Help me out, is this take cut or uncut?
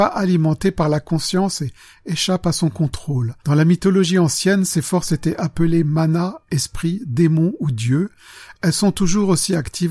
cut